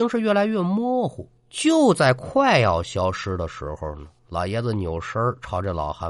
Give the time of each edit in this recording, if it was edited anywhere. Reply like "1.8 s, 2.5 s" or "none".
1.4 s

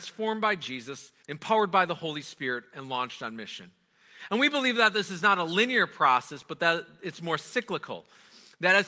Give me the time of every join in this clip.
1.2 s

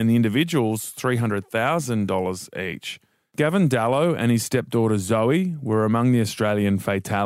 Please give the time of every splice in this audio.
none

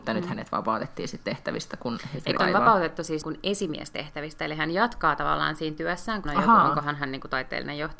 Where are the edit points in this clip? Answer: 2.4 s, 3.2 s, 6.2 s

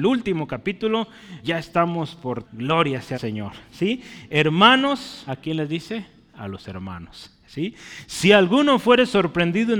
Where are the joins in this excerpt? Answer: 1.4 s, 2.4 s, 3.1 s, 5.3 s

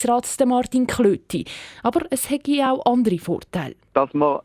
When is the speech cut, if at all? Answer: none

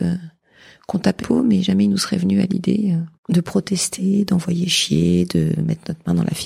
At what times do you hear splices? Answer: 1.2 s, 3.2 s

